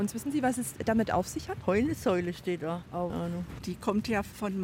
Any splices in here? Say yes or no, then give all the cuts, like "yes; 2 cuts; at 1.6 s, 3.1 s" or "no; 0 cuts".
yes; 1 cut; at 3.1 s